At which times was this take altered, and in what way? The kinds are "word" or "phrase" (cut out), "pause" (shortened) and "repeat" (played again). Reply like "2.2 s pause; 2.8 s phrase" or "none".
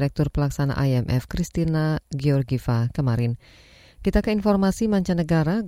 none